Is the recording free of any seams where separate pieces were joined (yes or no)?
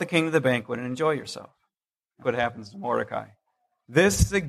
no